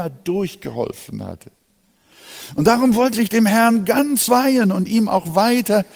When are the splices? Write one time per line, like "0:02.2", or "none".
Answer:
0:03.1
0:04.3